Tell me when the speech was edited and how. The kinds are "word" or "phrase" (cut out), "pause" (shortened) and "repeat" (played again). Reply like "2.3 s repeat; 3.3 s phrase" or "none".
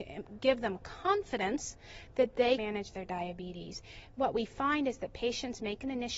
2.6 s word